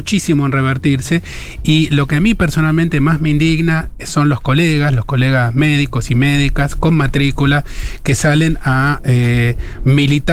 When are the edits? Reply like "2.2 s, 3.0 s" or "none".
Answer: none